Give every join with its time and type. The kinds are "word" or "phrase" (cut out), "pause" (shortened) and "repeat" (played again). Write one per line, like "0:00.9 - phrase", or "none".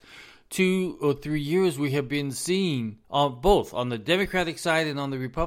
0:03.0 - pause